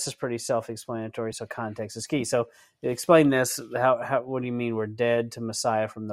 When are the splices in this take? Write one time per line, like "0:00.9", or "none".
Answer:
none